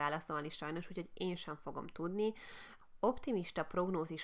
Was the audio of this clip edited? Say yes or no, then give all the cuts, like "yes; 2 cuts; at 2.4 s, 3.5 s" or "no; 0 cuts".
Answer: no; 0 cuts